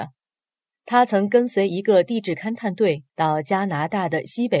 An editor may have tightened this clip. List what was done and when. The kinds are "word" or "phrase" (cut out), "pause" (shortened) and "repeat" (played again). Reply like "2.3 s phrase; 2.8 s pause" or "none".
3.1 s pause